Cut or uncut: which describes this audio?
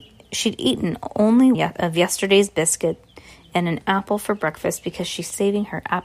cut